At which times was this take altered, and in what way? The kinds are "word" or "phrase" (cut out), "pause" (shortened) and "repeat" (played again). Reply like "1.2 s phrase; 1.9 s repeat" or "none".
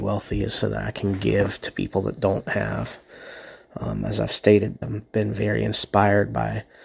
4.8 s word